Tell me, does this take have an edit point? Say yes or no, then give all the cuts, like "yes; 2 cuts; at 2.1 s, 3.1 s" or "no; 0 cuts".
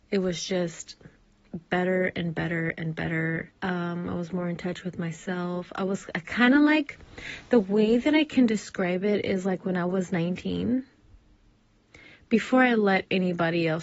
yes; 1 cut; at 3.6 s